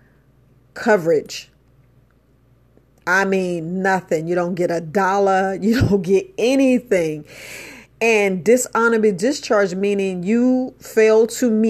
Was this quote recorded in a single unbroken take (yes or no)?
yes